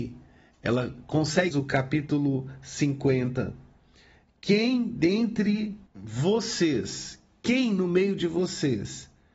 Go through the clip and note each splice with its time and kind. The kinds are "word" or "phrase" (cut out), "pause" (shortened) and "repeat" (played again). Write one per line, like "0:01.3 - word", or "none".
0:01.5 - phrase
0:05.9 - pause